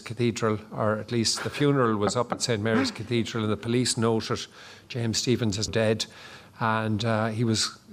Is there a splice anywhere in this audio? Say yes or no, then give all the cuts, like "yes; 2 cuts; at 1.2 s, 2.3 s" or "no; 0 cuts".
yes; 1 cut; at 5.7 s